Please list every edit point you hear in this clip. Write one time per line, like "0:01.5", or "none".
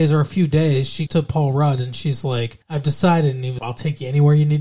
0:01.1
0:02.6
0:03.6